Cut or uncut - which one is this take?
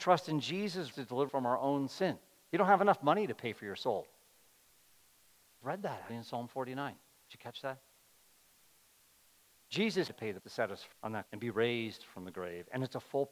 cut